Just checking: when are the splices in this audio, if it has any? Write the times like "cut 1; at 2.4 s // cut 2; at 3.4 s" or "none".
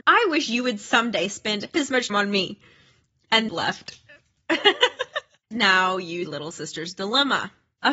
cut 1; at 1.7 s // cut 2; at 2.1 s // cut 3; at 3.5 s // cut 4; at 5.5 s // cut 5; at 6.2 s